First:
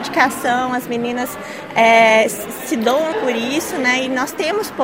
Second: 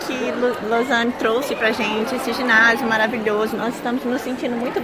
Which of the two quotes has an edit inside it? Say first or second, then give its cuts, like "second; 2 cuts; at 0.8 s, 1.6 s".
first; 1 cut; at 3.1 s